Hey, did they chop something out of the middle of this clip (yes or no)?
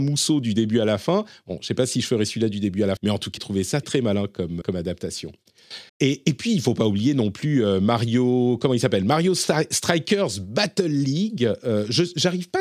yes